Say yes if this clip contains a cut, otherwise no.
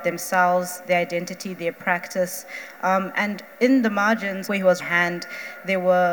yes